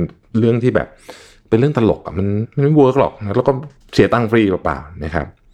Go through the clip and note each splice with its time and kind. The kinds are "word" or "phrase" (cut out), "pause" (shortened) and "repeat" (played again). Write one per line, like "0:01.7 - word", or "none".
0:03.8 - pause

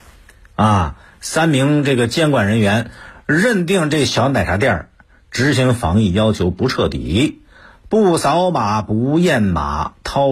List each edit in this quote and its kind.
none

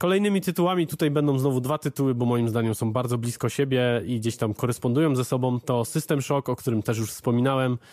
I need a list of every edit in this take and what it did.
none

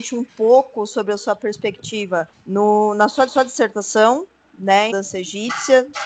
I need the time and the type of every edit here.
0:02.3 - pause
0:03.3 - repeat
0:04.9 - phrase

